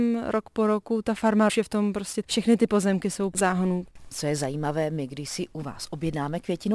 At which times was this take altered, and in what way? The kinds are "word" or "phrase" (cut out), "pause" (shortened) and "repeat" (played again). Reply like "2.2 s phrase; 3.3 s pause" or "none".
1.5 s phrase; 2.2 s phrase; 3.3 s word